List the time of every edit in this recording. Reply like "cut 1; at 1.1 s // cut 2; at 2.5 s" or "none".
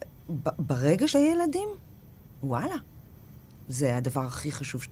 cut 1; at 1.1 s